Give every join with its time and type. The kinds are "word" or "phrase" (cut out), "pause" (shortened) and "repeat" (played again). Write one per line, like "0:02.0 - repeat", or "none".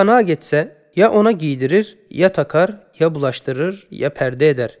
none